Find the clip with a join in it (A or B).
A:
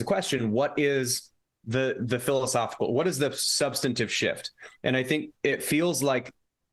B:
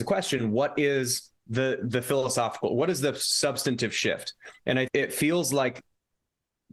B